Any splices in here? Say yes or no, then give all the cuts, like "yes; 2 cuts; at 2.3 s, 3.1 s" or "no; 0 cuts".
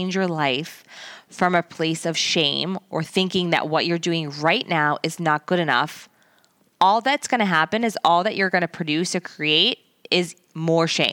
no; 0 cuts